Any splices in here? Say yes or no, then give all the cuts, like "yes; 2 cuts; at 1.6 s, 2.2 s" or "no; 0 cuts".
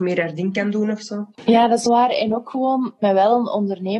yes; 3 cuts; at 1.3 s, 1.9 s, 3.0 s